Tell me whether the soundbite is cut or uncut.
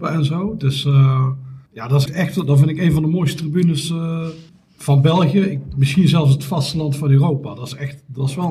cut